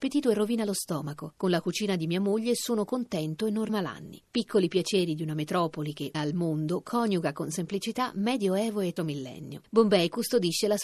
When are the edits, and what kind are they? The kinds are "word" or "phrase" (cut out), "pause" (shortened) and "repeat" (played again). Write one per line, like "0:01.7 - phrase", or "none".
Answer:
0:03.7 - word
0:06.1 - word
0:09.0 - word